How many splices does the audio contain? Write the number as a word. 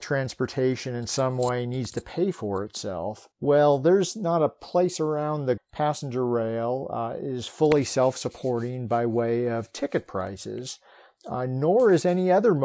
two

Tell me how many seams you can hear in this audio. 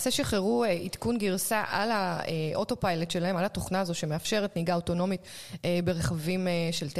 zero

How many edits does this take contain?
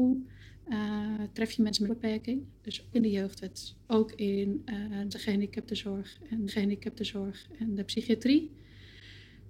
five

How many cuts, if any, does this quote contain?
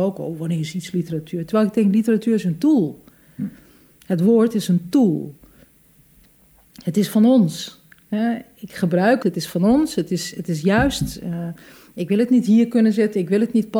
one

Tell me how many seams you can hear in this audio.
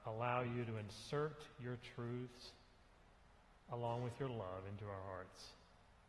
zero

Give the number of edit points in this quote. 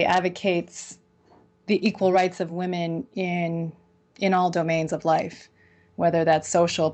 zero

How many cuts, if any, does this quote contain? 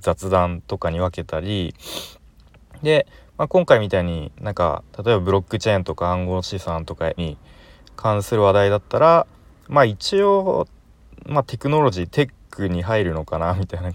two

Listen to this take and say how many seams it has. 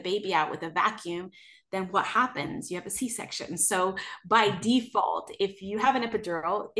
zero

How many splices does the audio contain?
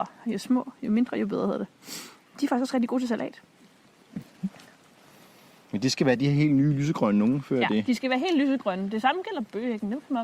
zero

